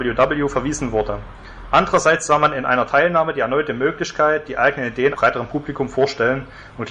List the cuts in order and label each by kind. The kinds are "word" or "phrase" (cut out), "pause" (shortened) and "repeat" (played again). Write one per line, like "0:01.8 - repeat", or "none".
0:05.1 - word

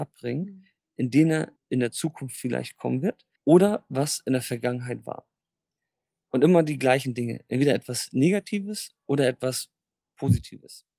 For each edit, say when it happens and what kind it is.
0:01.6 - phrase
0:03.4 - pause

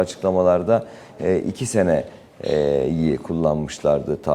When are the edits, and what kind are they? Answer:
none

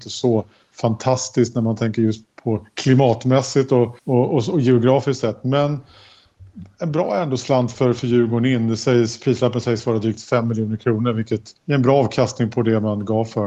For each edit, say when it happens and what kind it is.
0:04.0 - pause
0:11.6 - pause

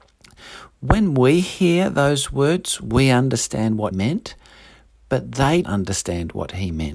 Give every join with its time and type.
0:03.9 - word
0:05.6 - word

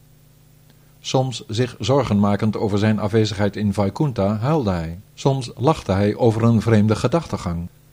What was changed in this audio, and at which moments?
0:05.1 - pause

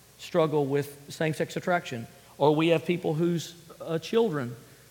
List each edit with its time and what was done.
none

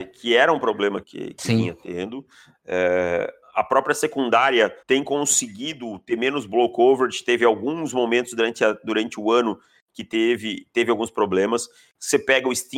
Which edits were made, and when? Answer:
0:01.0 - word
0:04.8 - pause

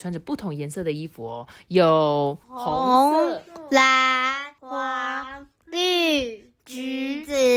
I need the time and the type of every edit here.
0:02.4 - pause
0:04.6 - pause

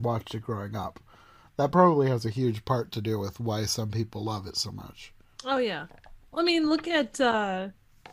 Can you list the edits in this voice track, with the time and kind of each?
none

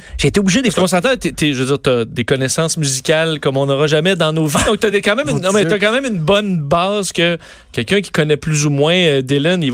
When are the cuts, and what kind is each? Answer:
none

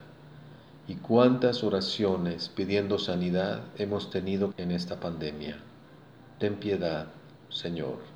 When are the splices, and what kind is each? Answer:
0:04.5 - phrase

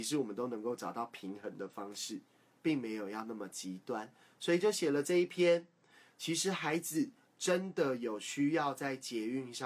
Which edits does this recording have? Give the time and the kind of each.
none

